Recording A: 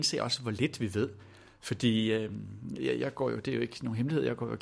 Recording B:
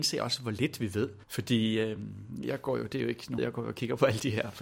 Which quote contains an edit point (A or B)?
B